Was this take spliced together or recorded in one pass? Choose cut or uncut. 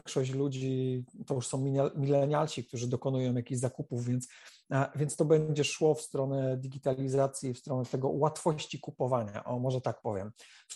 uncut